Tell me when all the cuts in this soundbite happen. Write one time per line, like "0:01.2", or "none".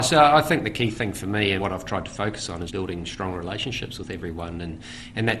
0:01.6
0:02.7

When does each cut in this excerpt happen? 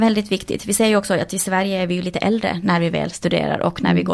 none

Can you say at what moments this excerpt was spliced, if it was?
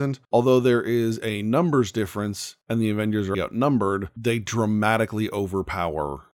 0:03.3

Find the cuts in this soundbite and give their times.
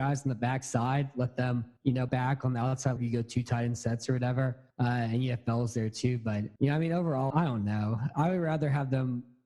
0:01.8
0:02.1
0:03.0
0:04.7
0:06.6
0:07.3

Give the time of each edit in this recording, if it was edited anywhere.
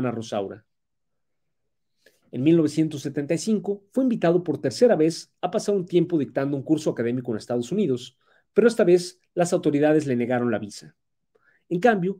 none

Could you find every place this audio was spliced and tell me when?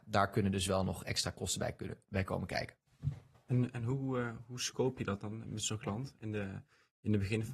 0:03.3

